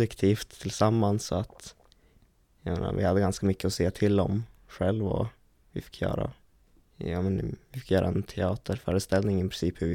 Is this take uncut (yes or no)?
no